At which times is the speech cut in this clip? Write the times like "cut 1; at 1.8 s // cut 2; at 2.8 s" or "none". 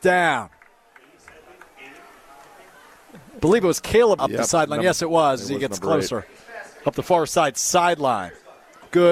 cut 1; at 4.2 s